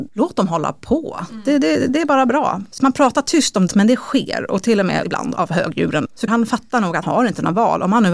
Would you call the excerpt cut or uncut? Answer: cut